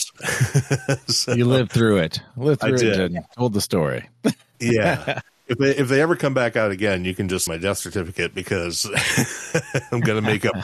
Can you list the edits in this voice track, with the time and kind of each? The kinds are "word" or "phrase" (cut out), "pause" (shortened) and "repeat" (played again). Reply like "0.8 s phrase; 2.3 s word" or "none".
7.5 s word